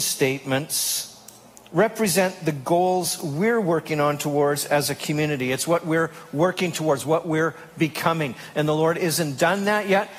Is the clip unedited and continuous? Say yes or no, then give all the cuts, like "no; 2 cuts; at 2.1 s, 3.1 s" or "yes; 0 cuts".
yes; 0 cuts